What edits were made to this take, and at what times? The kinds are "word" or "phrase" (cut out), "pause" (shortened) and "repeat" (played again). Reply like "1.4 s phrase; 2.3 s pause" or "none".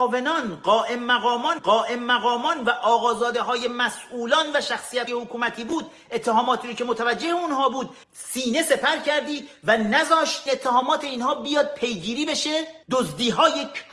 1.6 s repeat; 5.1 s word; 8.0 s pause; 10.5 s word; 12.8 s pause